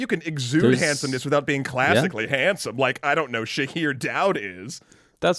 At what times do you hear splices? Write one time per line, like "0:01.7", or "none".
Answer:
none